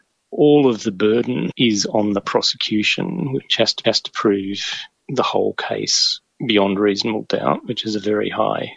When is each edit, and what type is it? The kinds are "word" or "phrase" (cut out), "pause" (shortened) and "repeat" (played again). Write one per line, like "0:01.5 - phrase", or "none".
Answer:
0:03.8 - repeat